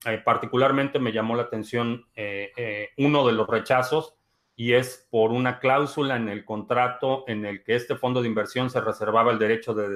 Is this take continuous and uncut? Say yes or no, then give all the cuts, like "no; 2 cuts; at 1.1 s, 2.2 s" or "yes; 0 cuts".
yes; 0 cuts